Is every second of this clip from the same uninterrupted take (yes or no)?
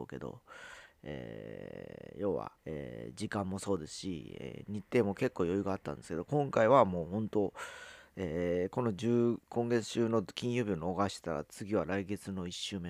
no